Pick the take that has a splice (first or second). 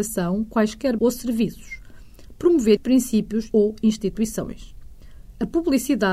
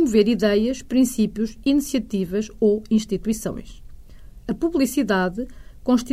first